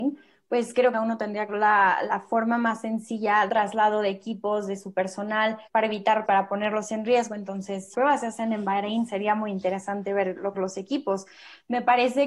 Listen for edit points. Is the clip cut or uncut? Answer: cut